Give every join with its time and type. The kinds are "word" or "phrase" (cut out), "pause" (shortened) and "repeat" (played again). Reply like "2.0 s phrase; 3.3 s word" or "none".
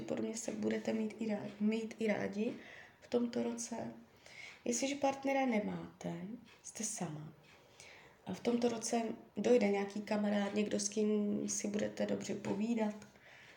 none